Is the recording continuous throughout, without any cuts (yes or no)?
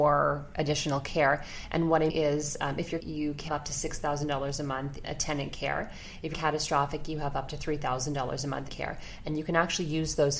no